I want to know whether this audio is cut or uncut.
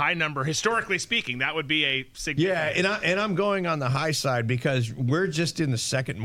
uncut